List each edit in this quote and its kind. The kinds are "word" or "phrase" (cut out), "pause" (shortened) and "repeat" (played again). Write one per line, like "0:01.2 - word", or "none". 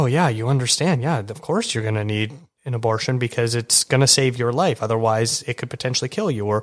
none